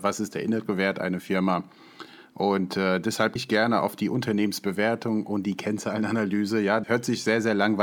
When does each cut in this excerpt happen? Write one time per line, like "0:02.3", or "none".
0:03.4
0:06.8

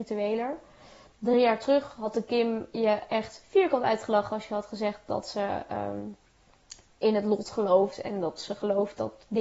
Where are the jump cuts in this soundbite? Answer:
none

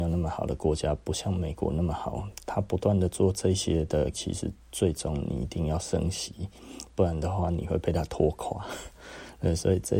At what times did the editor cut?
0:04.1

